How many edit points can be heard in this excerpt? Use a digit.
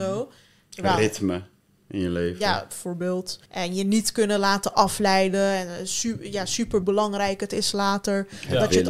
2